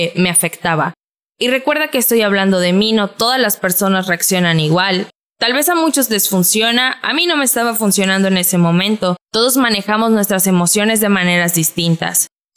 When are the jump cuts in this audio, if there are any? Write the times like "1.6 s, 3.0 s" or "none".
none